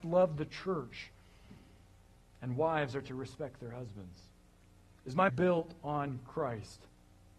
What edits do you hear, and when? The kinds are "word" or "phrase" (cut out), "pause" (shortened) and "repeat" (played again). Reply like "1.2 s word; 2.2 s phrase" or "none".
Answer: 5.3 s word